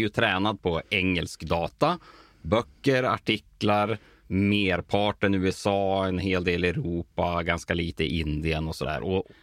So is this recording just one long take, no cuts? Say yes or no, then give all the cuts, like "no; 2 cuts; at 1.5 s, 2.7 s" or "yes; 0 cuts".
yes; 0 cuts